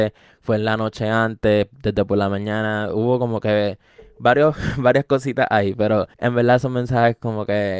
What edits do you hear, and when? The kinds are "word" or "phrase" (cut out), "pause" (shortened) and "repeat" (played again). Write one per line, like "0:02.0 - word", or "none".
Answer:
0:06.1 - pause